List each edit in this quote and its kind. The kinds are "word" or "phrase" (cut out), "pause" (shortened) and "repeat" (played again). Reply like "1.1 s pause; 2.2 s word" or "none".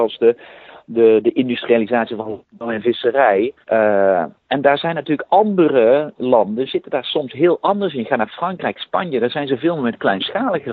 3.6 s pause